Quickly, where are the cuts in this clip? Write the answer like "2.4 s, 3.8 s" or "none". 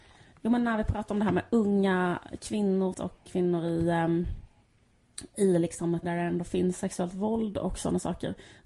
2.9 s, 3.3 s, 6.0 s